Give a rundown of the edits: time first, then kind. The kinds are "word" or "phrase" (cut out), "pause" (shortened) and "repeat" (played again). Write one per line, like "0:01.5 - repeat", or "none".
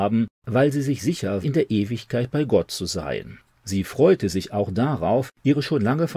0:01.4 - phrase
0:03.4 - pause